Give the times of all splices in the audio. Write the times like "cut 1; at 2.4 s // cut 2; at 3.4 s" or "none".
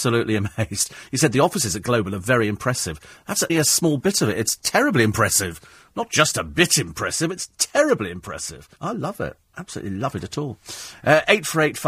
cut 1; at 3.5 s // cut 2; at 8.8 s